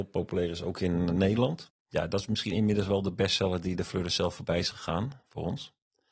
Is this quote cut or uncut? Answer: cut